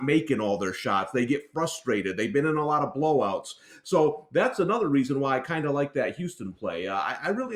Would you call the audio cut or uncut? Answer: uncut